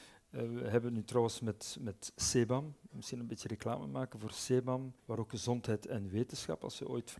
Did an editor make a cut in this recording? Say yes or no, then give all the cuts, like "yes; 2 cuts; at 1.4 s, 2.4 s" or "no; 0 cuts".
yes; 1 cut; at 5.0 s